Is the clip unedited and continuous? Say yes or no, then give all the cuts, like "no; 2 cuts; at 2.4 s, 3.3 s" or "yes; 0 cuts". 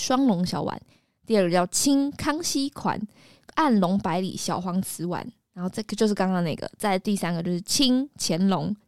yes; 0 cuts